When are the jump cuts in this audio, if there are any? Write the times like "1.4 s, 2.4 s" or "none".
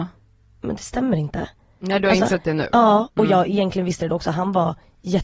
none